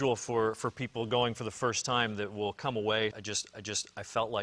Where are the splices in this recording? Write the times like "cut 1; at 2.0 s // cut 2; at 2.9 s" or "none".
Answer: cut 1; at 3.1 s // cut 2; at 3.5 s

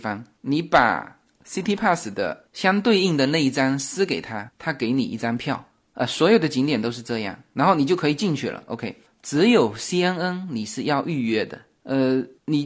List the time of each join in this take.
none

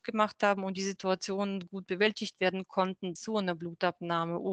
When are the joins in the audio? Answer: cut 1; at 3.2 s

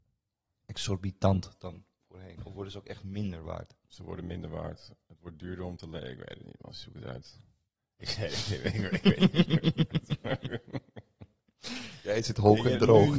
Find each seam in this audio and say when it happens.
none

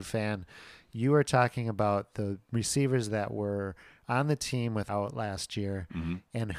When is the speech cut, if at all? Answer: cut 1; at 4.9 s

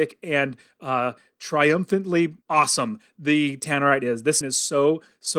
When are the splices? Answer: cut 1; at 2.4 s // cut 2; at 4.4 s

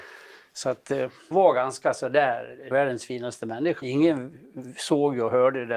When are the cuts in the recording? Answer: cut 1; at 1.3 s // cut 2; at 2.7 s // cut 3; at 3.8 s

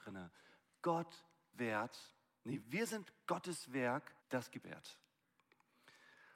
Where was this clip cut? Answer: cut 1; at 1.5 s // cut 2; at 2.6 s // cut 3; at 4.2 s // cut 4; at 4.6 s

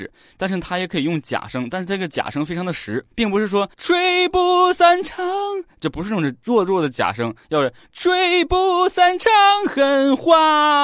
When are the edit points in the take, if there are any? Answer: cut 1; at 3.1 s // cut 2; at 3.7 s

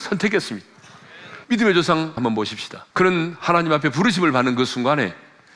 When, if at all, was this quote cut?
cut 1; at 1.4 s // cut 2; at 2.2 s // cut 3; at 2.9 s

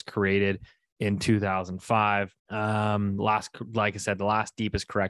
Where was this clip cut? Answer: cut 1; at 2.4 s

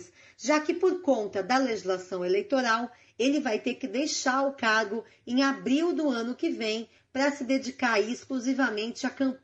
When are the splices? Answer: none

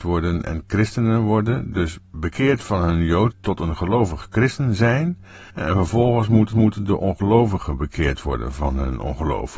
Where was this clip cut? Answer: cut 1; at 3.3 s // cut 2; at 5.5 s // cut 3; at 6.5 s

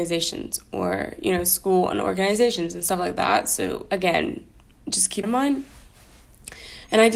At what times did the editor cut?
cut 1; at 5.2 s

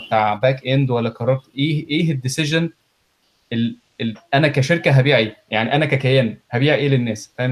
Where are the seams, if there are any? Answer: none

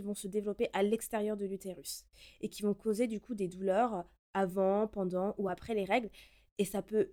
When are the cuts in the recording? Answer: none

